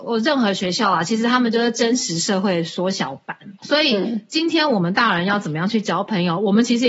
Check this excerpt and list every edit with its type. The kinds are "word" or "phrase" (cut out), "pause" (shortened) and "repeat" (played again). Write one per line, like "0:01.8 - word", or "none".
0:03.6 - pause